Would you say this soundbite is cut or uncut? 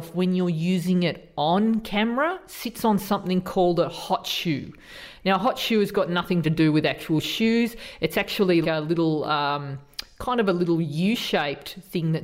cut